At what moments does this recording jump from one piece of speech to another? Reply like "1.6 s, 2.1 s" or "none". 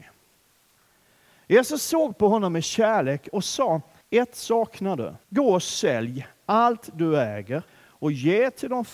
4.0 s, 5.2 s, 7.7 s